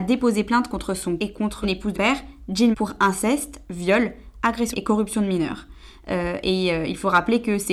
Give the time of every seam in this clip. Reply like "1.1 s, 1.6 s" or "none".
1.2 s, 1.6 s, 1.9 s, 2.7 s, 4.7 s